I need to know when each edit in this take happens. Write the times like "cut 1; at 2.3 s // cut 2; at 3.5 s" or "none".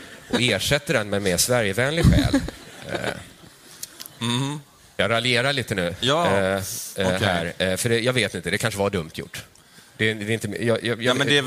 none